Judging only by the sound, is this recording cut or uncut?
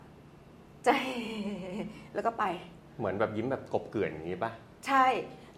uncut